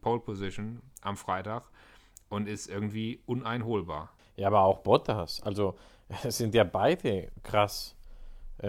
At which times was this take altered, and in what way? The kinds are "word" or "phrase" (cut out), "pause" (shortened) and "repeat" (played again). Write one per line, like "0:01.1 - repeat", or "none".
none